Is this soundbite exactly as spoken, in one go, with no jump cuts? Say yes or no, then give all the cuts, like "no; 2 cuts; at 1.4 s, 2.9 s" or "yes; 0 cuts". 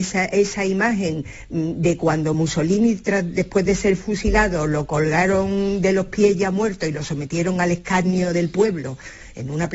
yes; 0 cuts